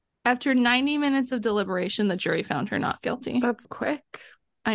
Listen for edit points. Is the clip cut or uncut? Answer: cut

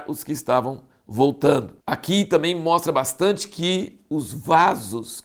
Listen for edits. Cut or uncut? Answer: cut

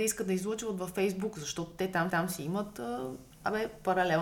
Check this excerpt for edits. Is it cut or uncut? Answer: cut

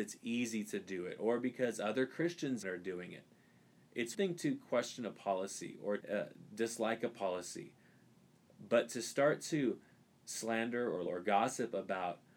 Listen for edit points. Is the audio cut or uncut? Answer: cut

